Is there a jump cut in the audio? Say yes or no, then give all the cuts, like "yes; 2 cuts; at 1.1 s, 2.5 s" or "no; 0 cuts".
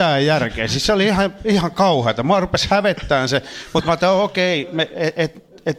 no; 0 cuts